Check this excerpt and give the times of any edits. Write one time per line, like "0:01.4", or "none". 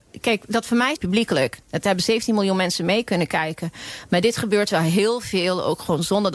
0:01.0